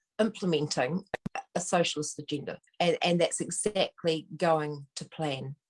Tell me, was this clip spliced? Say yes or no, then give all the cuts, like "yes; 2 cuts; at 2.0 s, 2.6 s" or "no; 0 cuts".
yes; 1 cut; at 2.7 s